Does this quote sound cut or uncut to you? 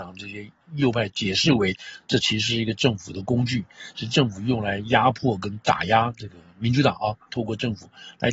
uncut